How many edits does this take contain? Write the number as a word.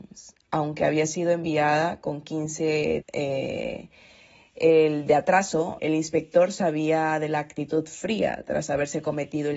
two